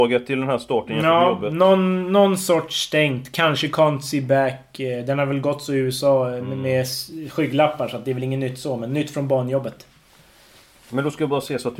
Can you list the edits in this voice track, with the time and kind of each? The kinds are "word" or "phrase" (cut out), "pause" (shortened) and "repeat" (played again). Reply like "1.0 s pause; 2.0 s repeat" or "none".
none